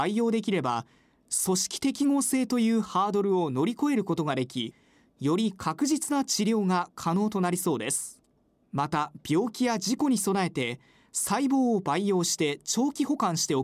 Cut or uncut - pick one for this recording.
uncut